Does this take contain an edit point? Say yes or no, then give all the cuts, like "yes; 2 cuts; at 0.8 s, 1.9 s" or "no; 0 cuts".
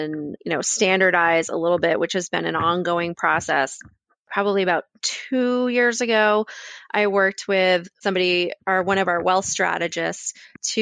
no; 0 cuts